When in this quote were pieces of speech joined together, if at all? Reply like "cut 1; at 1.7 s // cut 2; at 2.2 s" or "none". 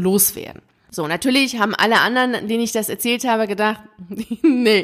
none